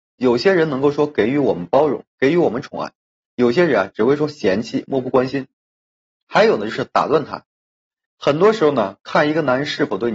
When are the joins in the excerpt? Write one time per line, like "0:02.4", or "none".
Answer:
none